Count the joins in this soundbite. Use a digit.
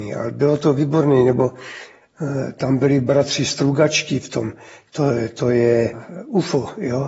0